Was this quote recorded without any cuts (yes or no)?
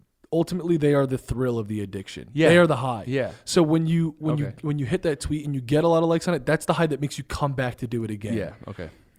yes